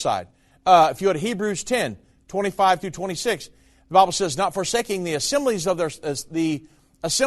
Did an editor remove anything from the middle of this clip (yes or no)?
no